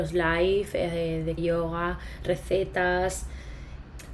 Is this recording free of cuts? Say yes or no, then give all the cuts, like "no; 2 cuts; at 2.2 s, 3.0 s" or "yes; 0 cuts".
no; 1 cut; at 1.4 s